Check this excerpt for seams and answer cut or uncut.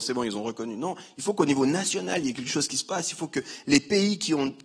uncut